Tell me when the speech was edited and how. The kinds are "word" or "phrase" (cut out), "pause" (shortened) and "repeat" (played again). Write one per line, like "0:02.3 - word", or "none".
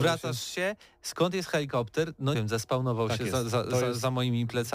0:02.3 - word